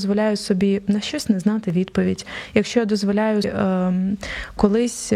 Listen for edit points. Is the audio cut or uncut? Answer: cut